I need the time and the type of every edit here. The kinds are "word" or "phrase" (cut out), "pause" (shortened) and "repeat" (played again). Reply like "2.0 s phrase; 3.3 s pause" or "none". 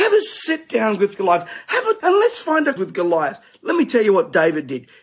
2.0 s word; 2.8 s word